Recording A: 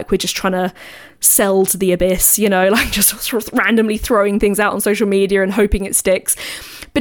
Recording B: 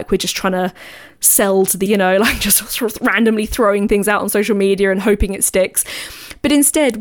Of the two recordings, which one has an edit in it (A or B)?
B